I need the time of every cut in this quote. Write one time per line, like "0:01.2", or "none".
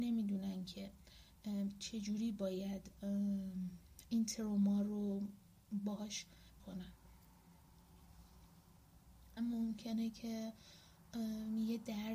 0:06.6
0:09.4